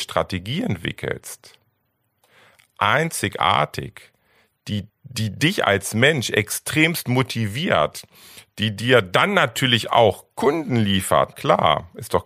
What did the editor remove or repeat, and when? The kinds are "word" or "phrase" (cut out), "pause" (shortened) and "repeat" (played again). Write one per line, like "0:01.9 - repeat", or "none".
0:04.9 - pause
0:11.3 - word